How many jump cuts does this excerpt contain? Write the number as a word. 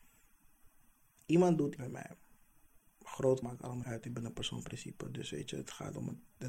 four